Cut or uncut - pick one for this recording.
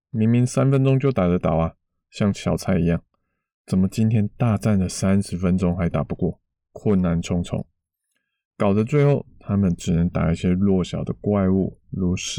uncut